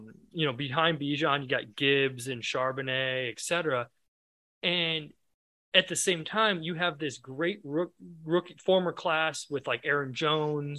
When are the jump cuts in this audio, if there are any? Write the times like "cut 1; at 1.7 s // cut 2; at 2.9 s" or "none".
none

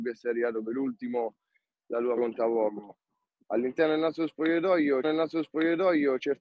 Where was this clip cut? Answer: cut 1; at 2.2 s // cut 2; at 5.0 s

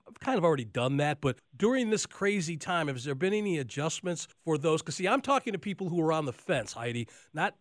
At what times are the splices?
cut 1; at 1.4 s // cut 2; at 4.3 s

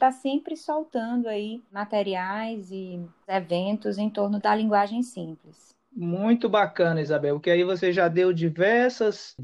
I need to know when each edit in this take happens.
none

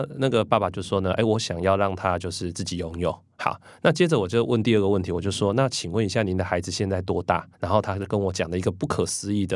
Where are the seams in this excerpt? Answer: cut 1; at 7.5 s

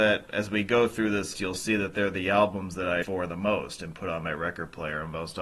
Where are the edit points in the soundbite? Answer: cut 1; at 1.3 s // cut 2; at 3.0 s

